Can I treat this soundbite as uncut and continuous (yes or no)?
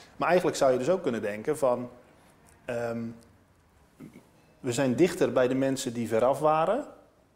yes